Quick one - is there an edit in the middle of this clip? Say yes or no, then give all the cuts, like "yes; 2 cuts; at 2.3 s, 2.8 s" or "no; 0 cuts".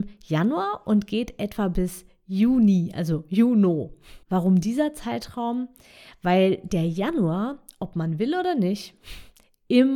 yes; 1 cut; at 4.2 s